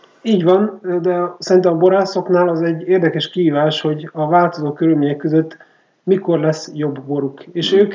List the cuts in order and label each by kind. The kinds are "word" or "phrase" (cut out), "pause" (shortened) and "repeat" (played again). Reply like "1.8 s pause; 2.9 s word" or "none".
none